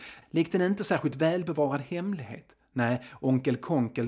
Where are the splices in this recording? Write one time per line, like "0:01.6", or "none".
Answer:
none